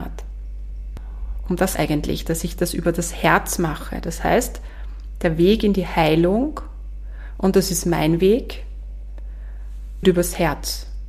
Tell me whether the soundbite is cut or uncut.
cut